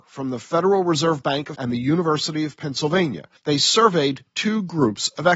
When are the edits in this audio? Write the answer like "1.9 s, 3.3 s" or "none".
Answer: 1.5 s, 3.4 s

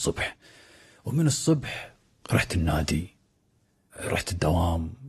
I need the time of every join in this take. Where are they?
none

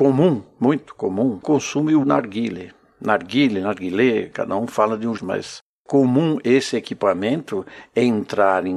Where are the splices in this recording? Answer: 2.0 s, 5.2 s

